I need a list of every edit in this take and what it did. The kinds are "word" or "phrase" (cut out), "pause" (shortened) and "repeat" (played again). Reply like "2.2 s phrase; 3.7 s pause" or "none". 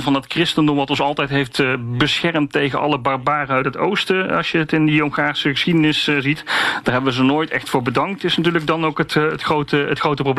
none